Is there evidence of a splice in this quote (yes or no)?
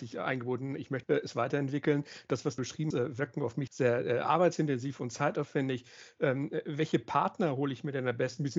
yes